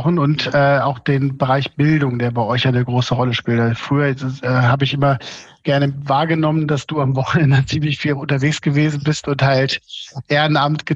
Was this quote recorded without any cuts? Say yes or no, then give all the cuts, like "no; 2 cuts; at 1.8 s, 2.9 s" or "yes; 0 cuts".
yes; 0 cuts